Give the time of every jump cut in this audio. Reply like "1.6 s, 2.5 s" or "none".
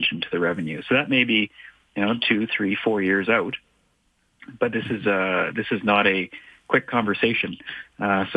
none